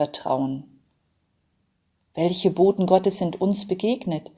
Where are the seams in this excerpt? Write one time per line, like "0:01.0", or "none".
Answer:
none